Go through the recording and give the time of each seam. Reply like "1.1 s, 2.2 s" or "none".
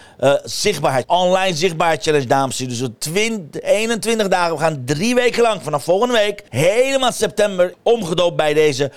1.0 s, 6.5 s, 7.7 s